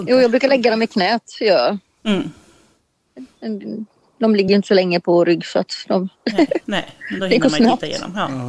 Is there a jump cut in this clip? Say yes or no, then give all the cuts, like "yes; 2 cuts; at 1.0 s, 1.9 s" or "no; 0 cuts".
no; 0 cuts